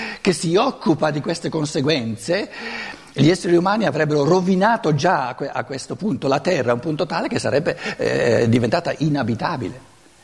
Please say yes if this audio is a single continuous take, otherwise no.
yes